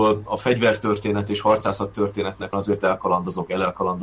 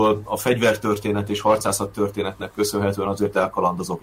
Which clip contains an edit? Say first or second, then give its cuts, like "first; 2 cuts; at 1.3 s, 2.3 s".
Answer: first; 1 cut; at 2.5 s